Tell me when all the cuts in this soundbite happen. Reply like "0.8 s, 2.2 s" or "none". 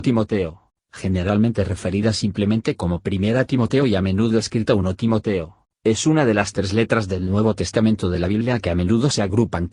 none